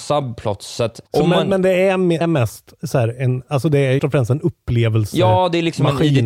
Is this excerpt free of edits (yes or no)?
no